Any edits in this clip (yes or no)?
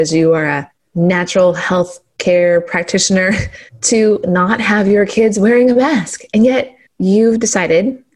yes